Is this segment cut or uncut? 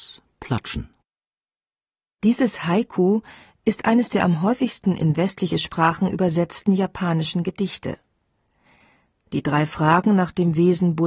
uncut